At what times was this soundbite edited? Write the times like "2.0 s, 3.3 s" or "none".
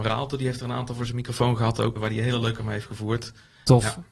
2.0 s, 2.6 s